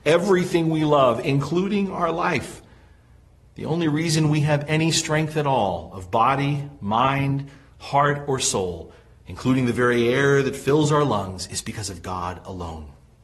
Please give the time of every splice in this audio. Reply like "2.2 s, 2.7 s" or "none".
none